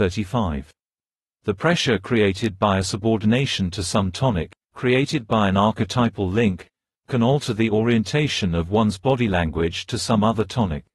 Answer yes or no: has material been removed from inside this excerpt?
yes